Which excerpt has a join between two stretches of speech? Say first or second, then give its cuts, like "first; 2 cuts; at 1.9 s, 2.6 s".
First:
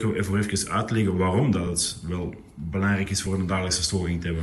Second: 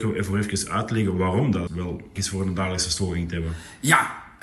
second; 2 cuts; at 1.7 s, 2.2 s